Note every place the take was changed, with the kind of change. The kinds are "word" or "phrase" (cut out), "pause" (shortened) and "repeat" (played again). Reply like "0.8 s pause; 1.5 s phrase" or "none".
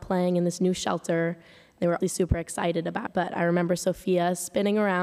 2.0 s word; 3.1 s word